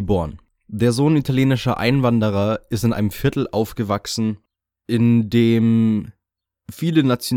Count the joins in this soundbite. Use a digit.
0